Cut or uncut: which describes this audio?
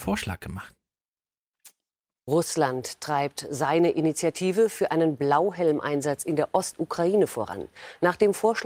uncut